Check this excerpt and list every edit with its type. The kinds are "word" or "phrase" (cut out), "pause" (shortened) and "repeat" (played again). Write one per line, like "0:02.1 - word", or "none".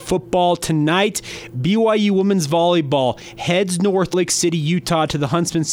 0:04.1 - word